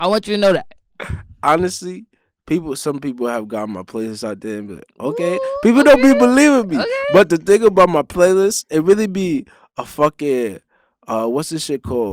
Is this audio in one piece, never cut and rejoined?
yes; 0 cuts

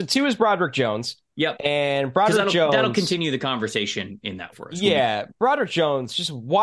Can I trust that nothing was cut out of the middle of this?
no; 1 cut; at 4.5 s

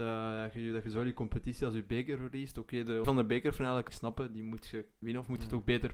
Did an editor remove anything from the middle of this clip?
yes; 3 cuts; at 3.0 s, 3.9 s, 5.0 s

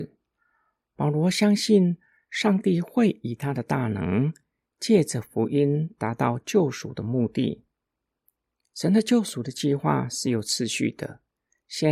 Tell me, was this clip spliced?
no; 0 cuts

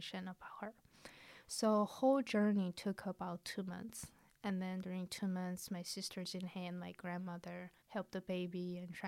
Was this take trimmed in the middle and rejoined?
yes; 1 cut; at 7.8 s

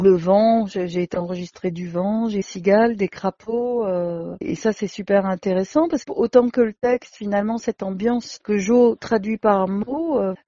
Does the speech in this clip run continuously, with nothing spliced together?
no; 2 cuts; at 2.4 s, 6.0 s

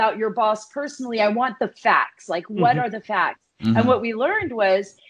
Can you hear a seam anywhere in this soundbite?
no; 0 cuts

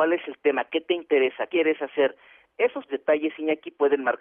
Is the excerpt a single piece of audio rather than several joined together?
no; 2 cuts; at 1.5 s, 2.9 s

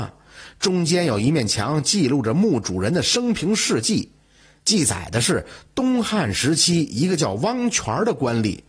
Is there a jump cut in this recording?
no; 0 cuts

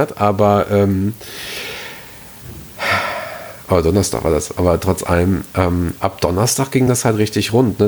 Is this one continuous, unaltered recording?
yes; 0 cuts

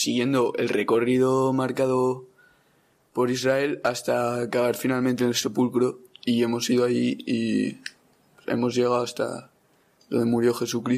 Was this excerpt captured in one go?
yes; 0 cuts

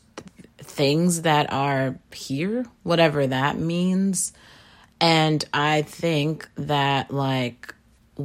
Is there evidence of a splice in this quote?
no; 0 cuts

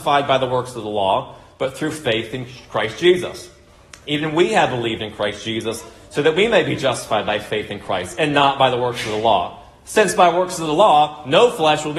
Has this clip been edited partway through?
no; 0 cuts

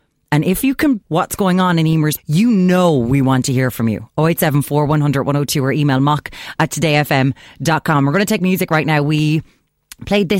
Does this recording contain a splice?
yes; 2 cuts; at 1.0 s, 2.2 s

